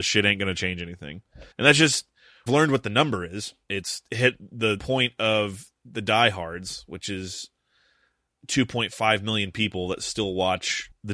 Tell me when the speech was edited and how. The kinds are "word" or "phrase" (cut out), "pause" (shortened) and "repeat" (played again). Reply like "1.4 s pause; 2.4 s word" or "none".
1.5 s pause; 2.5 s phrase; 3.6 s pause; 4.8 s word; 8.4 s phrase